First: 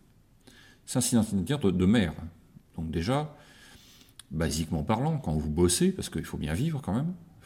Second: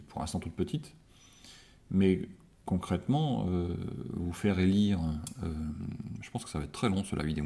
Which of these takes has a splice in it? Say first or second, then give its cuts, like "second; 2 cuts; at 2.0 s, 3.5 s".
second; 1 cut; at 2.5 s